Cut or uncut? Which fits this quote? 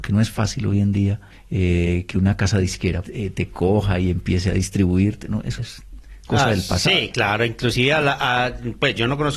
cut